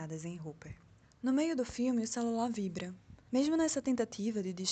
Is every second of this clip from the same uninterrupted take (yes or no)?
no